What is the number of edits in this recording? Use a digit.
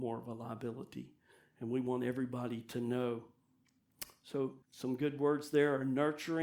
1